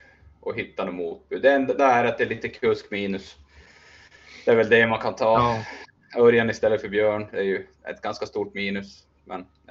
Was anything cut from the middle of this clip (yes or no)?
yes